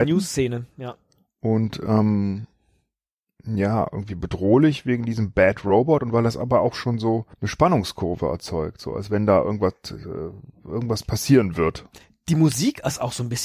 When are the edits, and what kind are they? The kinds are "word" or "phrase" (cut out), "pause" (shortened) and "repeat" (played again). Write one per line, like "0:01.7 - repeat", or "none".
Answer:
0:07.3 - pause